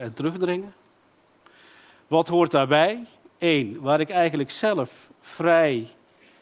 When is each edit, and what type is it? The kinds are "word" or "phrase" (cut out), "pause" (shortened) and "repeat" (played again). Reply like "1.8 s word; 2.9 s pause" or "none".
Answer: none